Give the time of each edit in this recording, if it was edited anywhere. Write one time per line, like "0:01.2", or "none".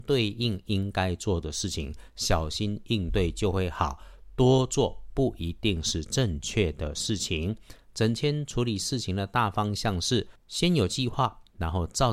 0:10.4